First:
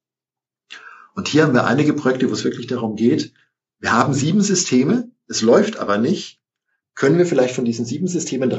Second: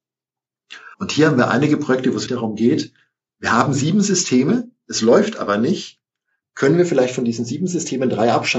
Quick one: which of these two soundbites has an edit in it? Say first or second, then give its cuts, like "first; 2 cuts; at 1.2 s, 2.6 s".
second; 2 cuts; at 0.9 s, 2.3 s